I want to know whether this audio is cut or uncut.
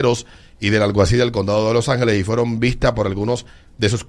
uncut